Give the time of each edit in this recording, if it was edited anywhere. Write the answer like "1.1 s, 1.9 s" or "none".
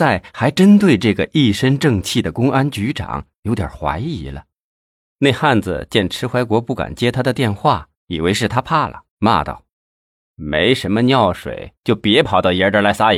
4.8 s, 8.0 s, 9.1 s, 9.7 s